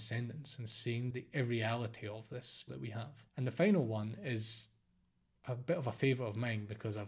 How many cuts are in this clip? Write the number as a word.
three